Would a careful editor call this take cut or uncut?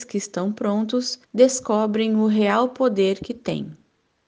cut